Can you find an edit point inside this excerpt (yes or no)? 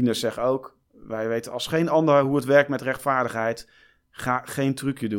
no